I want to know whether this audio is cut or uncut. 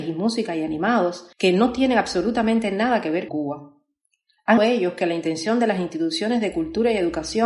cut